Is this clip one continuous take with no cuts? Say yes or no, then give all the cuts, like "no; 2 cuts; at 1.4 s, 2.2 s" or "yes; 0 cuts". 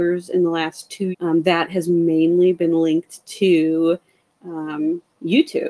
no; 1 cut; at 1.1 s